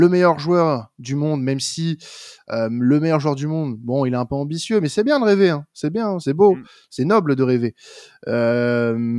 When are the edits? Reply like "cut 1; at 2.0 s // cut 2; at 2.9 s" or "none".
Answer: none